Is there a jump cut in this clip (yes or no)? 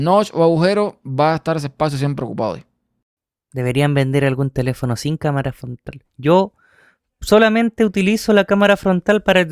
no